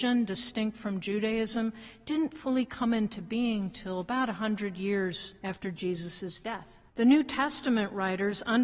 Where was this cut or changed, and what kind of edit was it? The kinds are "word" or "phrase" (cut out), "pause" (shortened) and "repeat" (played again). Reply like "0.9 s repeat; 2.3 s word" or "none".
5.4 s pause; 6.9 s pause